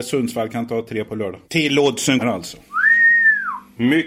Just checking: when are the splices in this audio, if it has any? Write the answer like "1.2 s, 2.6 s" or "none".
1.1 s, 1.4 s, 2.2 s